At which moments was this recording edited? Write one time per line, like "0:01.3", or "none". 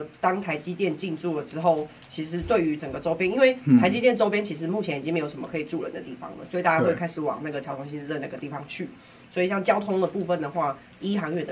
none